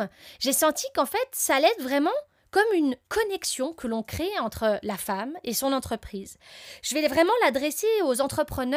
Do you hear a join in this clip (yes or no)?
no